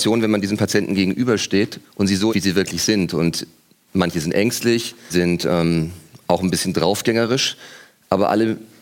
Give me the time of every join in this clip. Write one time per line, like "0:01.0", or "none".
0:02.3
0:05.1